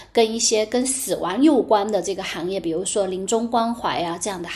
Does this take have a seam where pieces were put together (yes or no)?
no